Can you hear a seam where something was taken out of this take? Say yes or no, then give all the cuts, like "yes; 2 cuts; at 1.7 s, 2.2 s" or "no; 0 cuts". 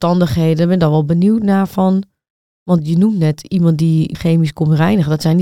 no; 0 cuts